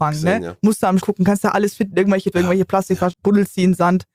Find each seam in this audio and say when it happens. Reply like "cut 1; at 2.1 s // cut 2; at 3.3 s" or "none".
cut 1; at 1.0 s // cut 2; at 2.3 s // cut 3; at 3.1 s